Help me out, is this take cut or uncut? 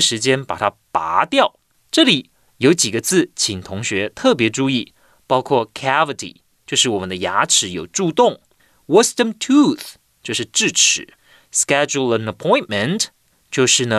uncut